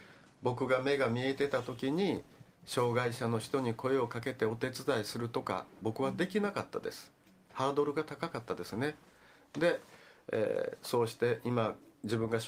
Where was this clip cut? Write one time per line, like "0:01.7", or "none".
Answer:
none

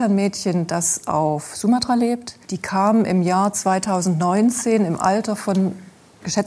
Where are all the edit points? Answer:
0:02.4

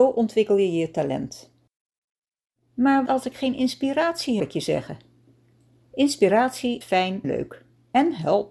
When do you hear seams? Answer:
0:03.1
0:04.4
0:06.8
0:07.2

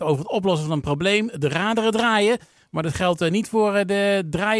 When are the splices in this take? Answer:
none

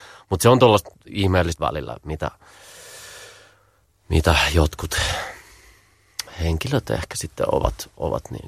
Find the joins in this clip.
0:01.6

